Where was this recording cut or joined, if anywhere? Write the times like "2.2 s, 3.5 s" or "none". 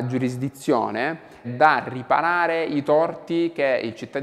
1.4 s